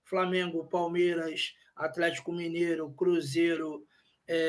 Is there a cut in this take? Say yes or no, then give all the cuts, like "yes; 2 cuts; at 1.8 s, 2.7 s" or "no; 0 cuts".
no; 0 cuts